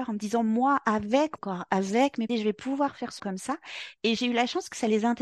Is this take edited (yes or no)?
yes